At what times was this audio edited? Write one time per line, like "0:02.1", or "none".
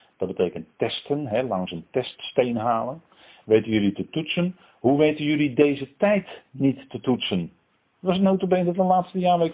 none